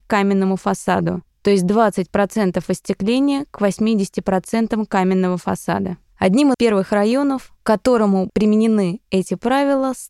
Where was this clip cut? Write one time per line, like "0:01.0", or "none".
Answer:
0:01.3
0:06.5
0:07.6
0:08.3